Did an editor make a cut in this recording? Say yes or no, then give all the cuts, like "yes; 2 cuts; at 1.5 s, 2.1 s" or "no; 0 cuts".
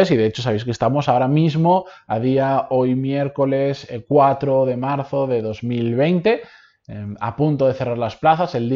no; 0 cuts